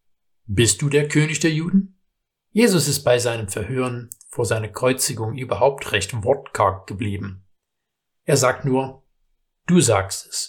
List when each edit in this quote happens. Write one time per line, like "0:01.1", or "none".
0:02.3